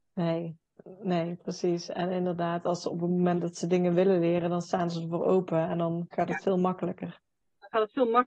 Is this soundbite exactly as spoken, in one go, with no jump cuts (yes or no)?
yes